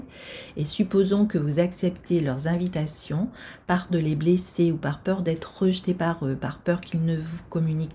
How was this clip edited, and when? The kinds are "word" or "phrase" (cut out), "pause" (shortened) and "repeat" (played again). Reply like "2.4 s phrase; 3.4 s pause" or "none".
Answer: 3.9 s word